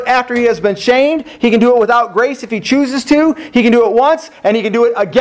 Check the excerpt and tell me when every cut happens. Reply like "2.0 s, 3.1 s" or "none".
none